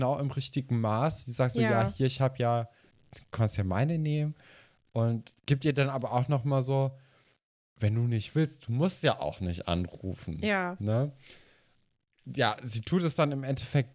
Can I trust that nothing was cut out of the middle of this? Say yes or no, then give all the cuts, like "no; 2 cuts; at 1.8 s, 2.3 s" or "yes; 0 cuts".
yes; 0 cuts